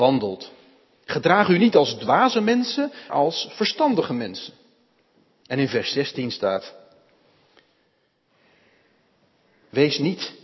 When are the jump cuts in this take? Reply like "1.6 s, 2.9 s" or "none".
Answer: 3.1 s